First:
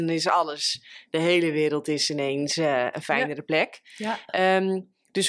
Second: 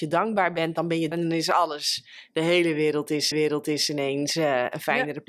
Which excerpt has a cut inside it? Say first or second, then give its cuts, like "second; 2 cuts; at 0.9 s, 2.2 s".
second; 2 cuts; at 1.1 s, 3.3 s